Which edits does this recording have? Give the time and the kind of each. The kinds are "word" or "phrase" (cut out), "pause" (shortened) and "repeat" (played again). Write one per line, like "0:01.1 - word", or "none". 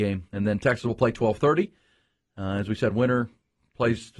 none